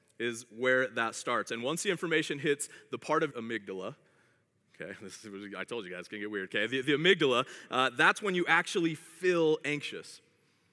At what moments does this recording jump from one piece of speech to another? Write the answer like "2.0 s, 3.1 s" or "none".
3.3 s, 6.8 s